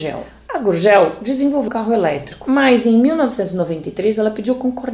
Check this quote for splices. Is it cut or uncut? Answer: cut